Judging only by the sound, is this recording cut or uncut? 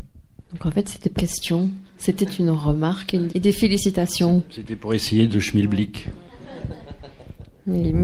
cut